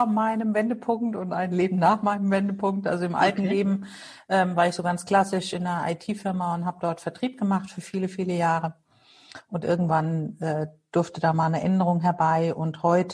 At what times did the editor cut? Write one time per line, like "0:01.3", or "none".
none